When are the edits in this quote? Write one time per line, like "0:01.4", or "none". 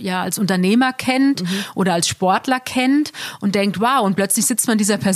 none